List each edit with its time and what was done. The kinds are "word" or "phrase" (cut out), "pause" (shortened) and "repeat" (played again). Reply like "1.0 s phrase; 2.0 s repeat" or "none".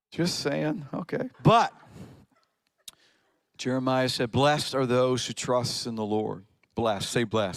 1.3 s pause